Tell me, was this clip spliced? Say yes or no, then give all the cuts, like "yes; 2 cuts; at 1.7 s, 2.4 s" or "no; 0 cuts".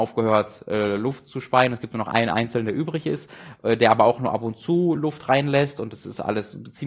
no; 0 cuts